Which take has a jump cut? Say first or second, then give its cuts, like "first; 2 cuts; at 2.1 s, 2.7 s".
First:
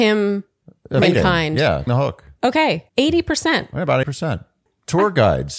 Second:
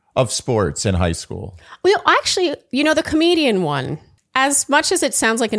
first; 4 cuts; at 1.0 s, 1.9 s, 2.9 s, 4.0 s